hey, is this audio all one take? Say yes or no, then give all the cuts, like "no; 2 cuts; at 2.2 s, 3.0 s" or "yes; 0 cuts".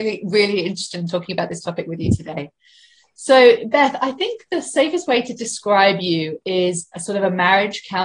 yes; 0 cuts